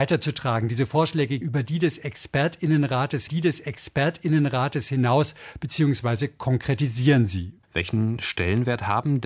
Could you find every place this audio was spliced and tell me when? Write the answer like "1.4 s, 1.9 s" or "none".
1.4 s, 3.3 s, 7.6 s